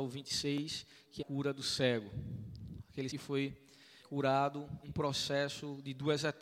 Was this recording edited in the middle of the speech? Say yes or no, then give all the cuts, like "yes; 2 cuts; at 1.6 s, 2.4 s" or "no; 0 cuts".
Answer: yes; 4 cuts; at 1.2 s, 3.1 s, 4.0 s, 4.8 s